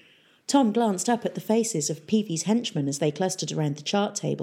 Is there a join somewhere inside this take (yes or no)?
no